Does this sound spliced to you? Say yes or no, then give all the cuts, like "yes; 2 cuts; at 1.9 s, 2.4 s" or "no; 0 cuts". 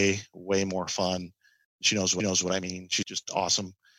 yes; 2 cuts; at 2.2 s, 3.0 s